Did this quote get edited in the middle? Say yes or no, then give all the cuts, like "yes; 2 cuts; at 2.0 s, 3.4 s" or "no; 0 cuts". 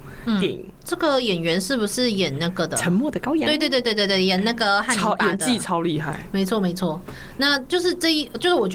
no; 0 cuts